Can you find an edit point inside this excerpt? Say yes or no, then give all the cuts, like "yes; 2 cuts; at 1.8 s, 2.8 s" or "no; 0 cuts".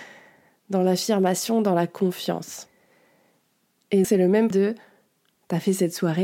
yes; 2 cuts; at 4.0 s, 4.5 s